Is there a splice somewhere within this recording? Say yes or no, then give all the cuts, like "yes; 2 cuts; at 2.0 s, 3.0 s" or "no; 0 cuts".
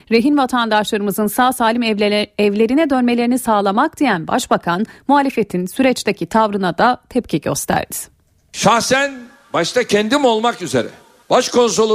no; 0 cuts